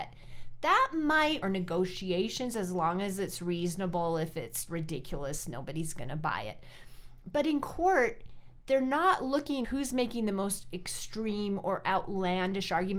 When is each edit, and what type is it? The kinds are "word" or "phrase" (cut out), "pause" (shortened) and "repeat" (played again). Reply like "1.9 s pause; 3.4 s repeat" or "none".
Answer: 1.4 s phrase; 4.7 s word; 9.6 s word